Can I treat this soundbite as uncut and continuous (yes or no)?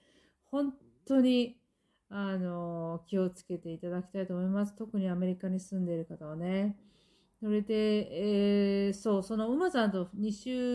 yes